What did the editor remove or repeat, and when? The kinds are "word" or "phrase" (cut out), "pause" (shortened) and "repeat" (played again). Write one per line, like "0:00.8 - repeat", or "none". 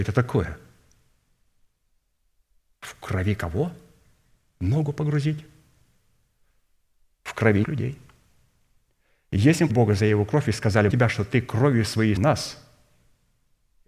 0:07.6 - word
0:09.7 - word
0:10.9 - word
0:12.2 - word